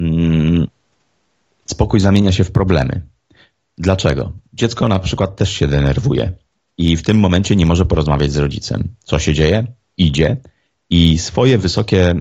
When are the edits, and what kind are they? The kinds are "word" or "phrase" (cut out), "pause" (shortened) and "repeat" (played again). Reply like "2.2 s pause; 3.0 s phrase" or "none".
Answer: none